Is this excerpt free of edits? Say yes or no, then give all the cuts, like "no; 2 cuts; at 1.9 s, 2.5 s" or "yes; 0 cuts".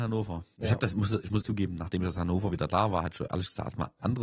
no; 1 cut; at 1.4 s